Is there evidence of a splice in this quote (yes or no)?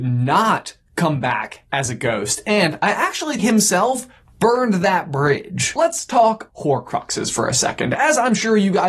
yes